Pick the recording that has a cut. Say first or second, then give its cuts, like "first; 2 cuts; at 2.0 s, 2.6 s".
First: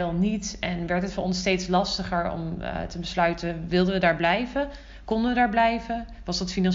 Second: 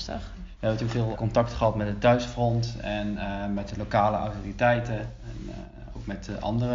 second; 1 cut; at 1.1 s